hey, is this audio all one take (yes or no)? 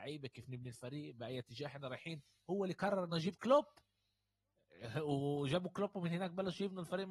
yes